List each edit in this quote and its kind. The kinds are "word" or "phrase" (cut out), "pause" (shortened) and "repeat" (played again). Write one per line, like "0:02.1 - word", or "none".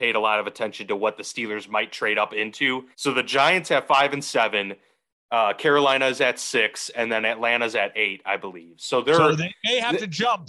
0:02.9 - pause